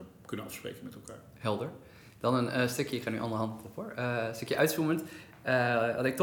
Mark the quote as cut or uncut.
uncut